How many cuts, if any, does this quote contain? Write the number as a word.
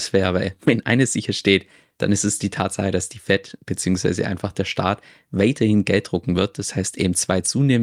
zero